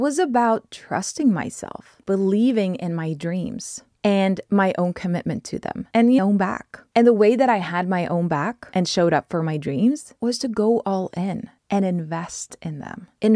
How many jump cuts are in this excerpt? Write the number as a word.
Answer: two